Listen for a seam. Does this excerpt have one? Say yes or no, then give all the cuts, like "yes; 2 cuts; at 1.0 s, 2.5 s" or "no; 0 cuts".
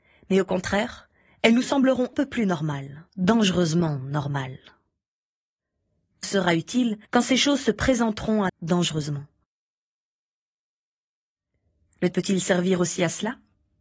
yes; 6 cuts; at 2.1 s, 3.1 s, 6.2 s, 7.0 s, 8.5 s, 12.1 s